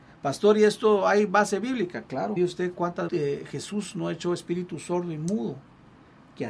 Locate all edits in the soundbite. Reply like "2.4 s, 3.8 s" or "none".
2.4 s, 3.1 s